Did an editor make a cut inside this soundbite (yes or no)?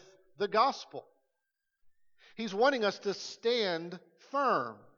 no